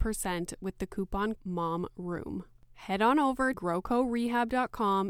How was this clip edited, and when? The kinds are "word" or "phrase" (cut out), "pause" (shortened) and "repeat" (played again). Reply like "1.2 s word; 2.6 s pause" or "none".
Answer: 1.4 s word; 3.5 s word